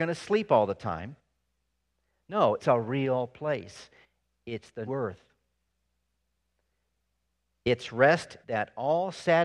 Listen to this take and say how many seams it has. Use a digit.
3